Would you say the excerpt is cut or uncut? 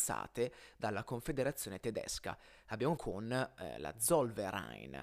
cut